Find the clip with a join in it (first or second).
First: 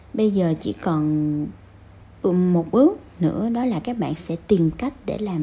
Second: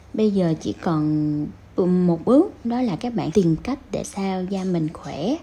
second